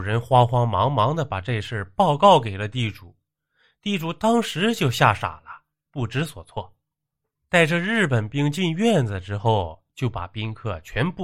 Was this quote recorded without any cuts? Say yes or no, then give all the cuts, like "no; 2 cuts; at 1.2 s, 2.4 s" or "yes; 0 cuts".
yes; 0 cuts